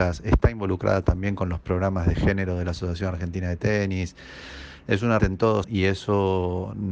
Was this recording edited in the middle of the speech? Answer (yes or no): yes